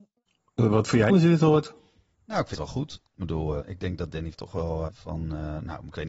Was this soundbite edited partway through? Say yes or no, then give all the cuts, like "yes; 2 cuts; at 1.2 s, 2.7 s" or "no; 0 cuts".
yes; 5 cuts; at 1.1 s, 2.5 s, 3.6 s, 4.3 s, 4.9 s